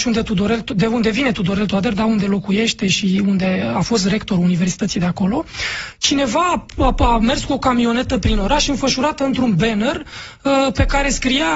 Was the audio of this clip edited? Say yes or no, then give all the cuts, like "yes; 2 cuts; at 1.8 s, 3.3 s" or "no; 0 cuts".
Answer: no; 0 cuts